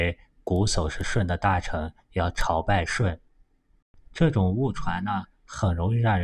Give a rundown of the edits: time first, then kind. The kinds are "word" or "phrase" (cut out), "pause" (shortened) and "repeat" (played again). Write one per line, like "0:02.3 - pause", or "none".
none